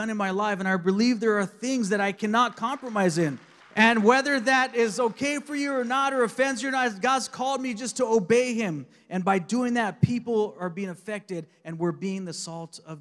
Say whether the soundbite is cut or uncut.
cut